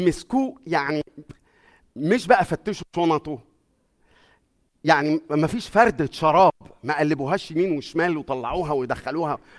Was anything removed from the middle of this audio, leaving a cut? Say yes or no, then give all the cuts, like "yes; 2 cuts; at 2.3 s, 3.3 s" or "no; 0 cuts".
no; 0 cuts